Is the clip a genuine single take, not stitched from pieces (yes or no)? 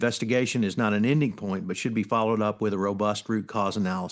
yes